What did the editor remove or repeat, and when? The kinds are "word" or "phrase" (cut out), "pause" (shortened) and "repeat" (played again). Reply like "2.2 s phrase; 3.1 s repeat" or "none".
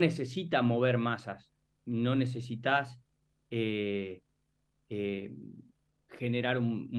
none